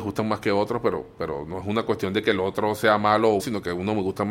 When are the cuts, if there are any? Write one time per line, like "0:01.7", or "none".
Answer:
0:03.4